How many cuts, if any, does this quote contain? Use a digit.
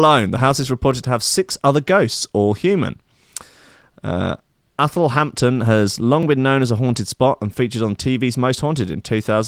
0